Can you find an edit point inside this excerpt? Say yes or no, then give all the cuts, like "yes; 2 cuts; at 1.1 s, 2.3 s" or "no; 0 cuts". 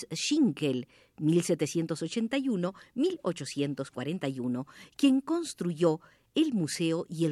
no; 0 cuts